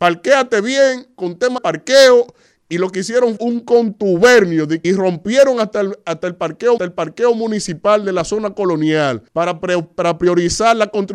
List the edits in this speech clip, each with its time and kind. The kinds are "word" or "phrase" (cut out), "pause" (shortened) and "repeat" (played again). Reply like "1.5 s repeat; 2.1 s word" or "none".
1.6 s word; 3.4 s word; 4.8 s phrase; 6.8 s repeat; 9.3 s pause